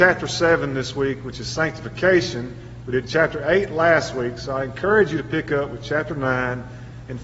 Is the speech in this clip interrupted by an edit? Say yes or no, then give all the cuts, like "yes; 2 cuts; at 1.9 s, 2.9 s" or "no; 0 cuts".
no; 0 cuts